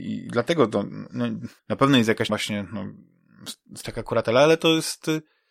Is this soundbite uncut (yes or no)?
no